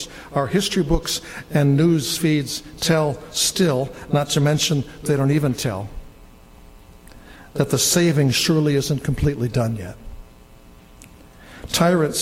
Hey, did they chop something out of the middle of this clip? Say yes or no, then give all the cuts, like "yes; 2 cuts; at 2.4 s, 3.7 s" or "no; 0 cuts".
yes; 1 cut; at 5.1 s